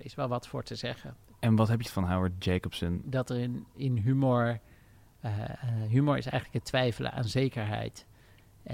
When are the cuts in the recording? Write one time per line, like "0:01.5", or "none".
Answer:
0:01.8
0:03.7